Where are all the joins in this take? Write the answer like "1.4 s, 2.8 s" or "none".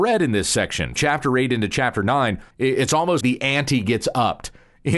1.0 s, 2.5 s, 3.2 s